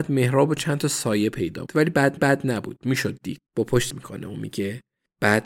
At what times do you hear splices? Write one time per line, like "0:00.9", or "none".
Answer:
0:01.7
0:02.2
0:03.5
0:03.9